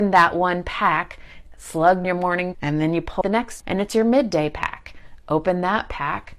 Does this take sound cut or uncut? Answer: cut